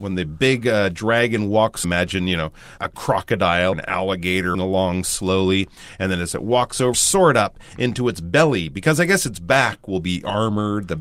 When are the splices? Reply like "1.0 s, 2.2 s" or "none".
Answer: 1.8 s, 2.8 s, 3.7 s, 4.5 s, 6.9 s

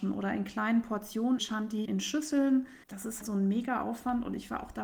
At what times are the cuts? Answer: 1.4 s, 1.9 s, 2.8 s, 3.2 s

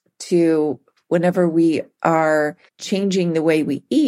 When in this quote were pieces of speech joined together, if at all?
2.7 s

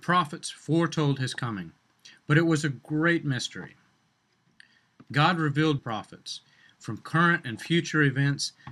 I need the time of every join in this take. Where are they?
5.8 s

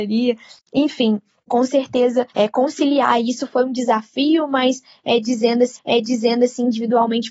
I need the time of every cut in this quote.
1.5 s, 2.3 s, 5.7 s

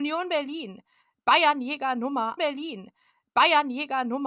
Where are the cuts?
2.4 s

